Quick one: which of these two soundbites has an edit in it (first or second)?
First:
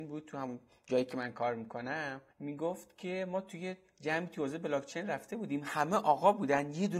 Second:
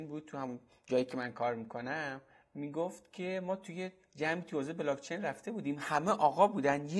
first